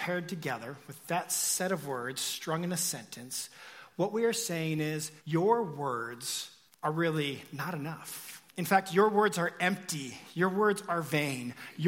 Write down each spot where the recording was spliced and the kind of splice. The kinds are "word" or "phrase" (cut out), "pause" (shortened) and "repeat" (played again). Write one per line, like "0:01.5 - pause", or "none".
0:05.2 - pause
0:06.7 - pause
0:08.5 - pause